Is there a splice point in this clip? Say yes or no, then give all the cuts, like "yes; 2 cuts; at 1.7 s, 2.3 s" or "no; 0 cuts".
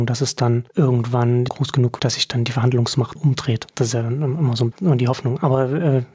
yes; 4 cuts; at 1.5 s, 2.0 s, 3.2 s, 4.7 s